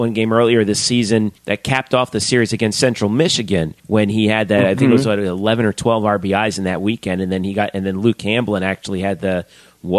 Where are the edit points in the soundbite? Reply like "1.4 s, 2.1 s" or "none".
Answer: 1.4 s, 3.8 s